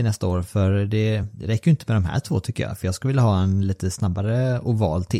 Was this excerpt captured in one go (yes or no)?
yes